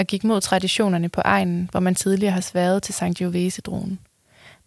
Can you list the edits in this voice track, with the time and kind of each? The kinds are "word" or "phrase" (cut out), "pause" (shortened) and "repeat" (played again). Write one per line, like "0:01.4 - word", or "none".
none